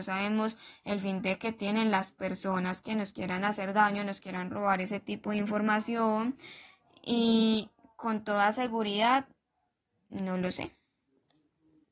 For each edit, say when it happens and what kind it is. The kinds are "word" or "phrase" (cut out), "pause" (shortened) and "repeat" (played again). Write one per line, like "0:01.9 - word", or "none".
none